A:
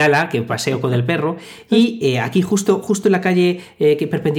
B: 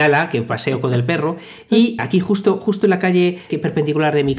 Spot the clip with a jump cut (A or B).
B